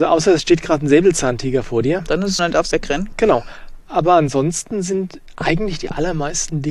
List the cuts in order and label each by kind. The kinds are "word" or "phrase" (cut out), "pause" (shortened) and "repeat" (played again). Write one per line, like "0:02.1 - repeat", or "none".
0:02.4 - word
0:02.7 - phrase